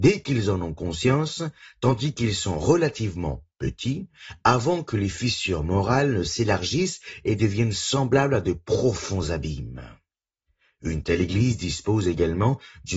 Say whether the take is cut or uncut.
cut